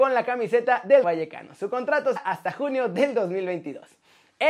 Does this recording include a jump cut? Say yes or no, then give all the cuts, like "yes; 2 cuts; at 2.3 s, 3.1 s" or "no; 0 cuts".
yes; 2 cuts; at 1.0 s, 2.2 s